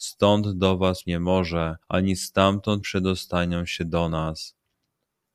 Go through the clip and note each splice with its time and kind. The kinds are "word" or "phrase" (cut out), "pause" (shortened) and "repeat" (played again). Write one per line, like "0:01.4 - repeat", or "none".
0:01.0 - word
0:01.8 - pause
0:02.8 - word